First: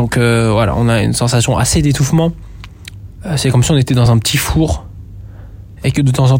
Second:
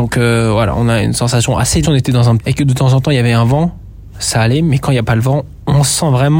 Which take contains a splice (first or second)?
second